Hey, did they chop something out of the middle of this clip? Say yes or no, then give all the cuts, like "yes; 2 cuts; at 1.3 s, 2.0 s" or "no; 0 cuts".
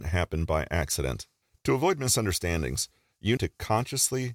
yes; 2 cuts; at 1.4 s, 3.4 s